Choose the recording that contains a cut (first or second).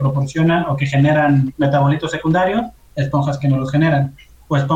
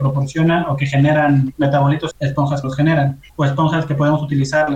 second